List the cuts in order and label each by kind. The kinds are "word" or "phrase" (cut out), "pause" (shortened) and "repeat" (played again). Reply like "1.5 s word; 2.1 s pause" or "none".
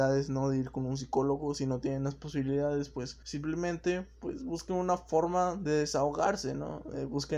3.2 s pause